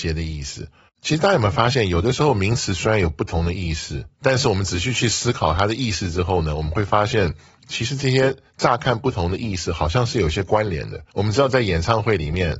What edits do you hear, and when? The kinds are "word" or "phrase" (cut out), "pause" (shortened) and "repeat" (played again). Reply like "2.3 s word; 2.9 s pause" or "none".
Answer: 11.1 s pause